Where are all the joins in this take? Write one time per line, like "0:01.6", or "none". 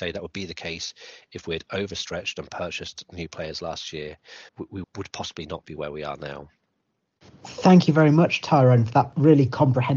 0:04.5
0:04.8

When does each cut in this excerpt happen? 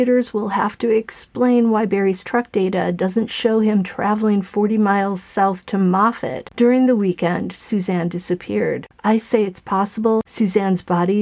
0:09.2

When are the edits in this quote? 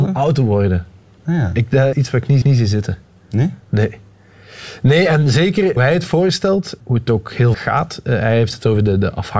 0:01.9
0:02.4
0:05.8
0:06.8
0:07.5

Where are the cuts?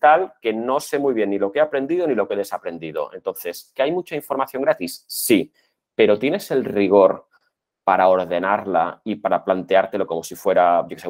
none

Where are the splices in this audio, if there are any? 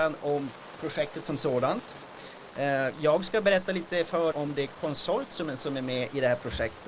0:04.3

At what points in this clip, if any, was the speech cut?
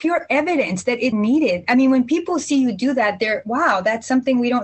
0:01.1

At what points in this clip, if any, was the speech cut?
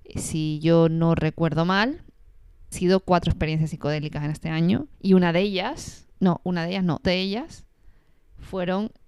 0:02.7
0:04.9
0:07.0

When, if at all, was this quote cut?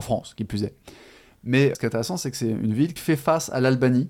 0:01.7
0:03.0

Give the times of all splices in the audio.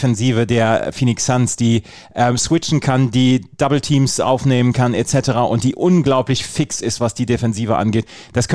none

